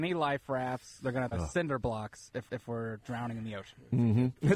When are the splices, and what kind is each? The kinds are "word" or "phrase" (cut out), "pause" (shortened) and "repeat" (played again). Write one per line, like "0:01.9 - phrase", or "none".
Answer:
0:01.3 - word
0:02.5 - repeat

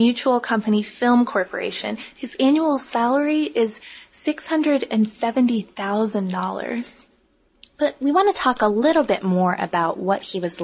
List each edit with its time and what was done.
none

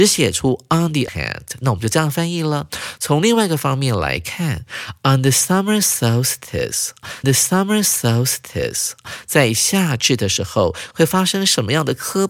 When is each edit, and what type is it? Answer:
0:01.1 - word
0:07.2 - repeat

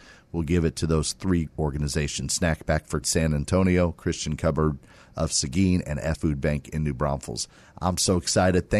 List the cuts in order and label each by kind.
0:01.5 - word
0:03.0 - word
0:06.1 - word

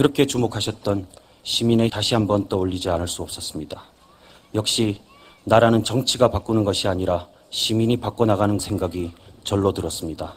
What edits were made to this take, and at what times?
0:01.9 - word
0:08.6 - word

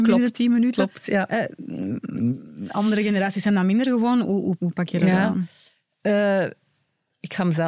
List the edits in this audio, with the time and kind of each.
0:04.6 - word

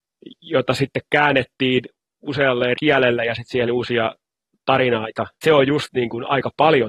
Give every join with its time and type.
0:02.7 - word
0:03.7 - word
0:05.4 - word

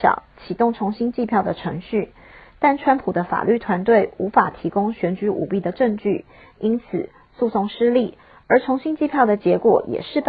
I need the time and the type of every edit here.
none

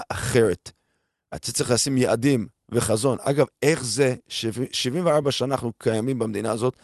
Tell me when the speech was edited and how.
none

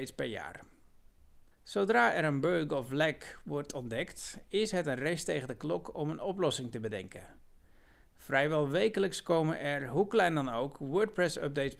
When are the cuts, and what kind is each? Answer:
0:01.5 - pause

